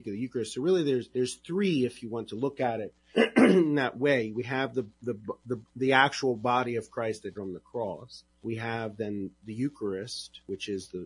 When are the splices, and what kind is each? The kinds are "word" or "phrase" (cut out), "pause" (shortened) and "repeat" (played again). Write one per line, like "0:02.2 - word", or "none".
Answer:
0:07.3 - word